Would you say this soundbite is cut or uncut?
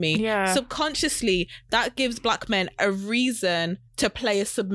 cut